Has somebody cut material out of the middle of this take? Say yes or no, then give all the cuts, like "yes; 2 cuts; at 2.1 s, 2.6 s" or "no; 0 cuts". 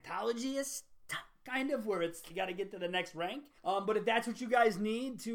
yes; 2 cuts; at 2.3 s, 3.6 s